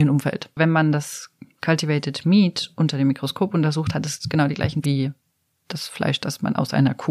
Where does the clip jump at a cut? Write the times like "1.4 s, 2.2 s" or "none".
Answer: 4.8 s

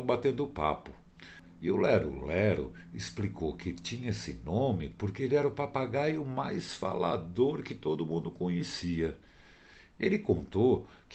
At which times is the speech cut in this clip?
none

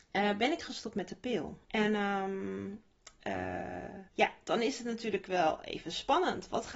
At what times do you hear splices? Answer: 1.6 s, 4.1 s

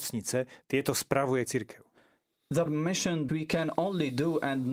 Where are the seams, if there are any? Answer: 1.4 s, 2.7 s, 3.3 s

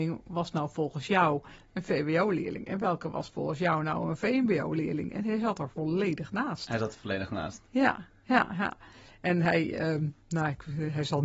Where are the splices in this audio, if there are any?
none

